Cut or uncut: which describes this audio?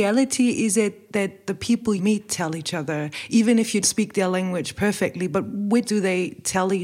cut